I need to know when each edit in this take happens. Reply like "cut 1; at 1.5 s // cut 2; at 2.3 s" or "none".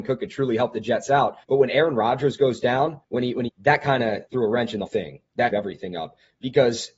cut 1; at 1.4 s // cut 2; at 3.0 s // cut 3; at 3.5 s // cut 4; at 4.3 s // cut 5; at 4.9 s // cut 6; at 5.5 s